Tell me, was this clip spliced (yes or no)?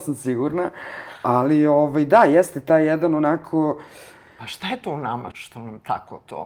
yes